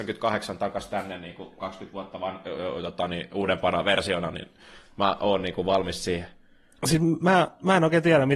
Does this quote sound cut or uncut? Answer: uncut